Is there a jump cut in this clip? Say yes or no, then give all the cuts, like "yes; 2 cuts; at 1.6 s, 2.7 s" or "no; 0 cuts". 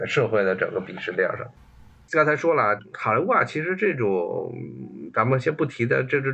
no; 0 cuts